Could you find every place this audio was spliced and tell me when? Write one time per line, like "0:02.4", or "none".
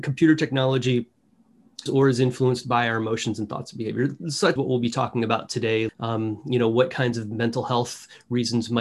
0:01.9
0:04.6
0:05.9